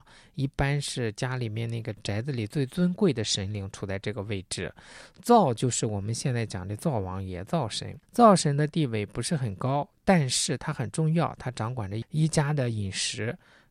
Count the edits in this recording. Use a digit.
1